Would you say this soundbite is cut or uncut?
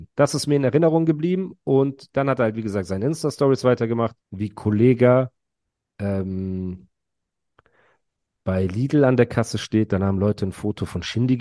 cut